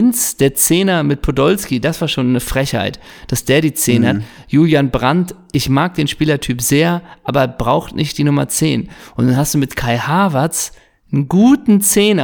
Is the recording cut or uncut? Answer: uncut